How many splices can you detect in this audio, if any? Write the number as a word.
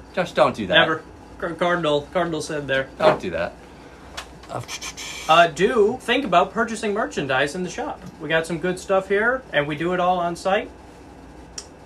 one